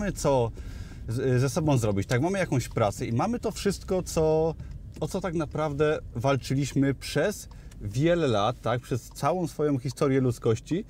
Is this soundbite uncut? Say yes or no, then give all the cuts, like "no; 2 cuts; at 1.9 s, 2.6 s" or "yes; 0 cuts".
yes; 0 cuts